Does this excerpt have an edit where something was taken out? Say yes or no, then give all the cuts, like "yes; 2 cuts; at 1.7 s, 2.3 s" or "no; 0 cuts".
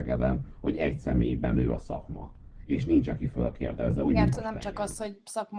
yes; 1 cut; at 4.3 s